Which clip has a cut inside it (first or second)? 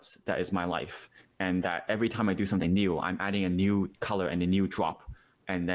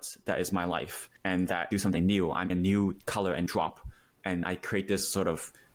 second